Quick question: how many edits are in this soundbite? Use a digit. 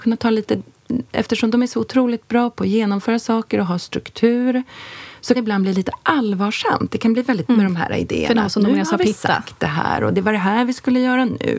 3